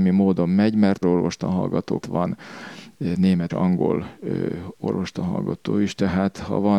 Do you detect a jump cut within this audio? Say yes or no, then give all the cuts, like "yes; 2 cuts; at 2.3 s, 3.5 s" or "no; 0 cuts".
yes; 3 cuts; at 1.0 s, 2.0 s, 3.5 s